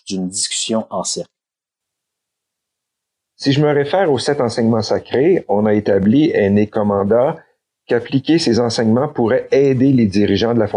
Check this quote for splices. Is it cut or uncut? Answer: uncut